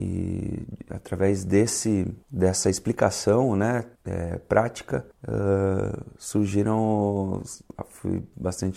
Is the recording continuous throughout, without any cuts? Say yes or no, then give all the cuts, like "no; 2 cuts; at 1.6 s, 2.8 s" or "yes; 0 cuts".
no; 3 cuts; at 2.2 s, 3.9 s, 5.1 s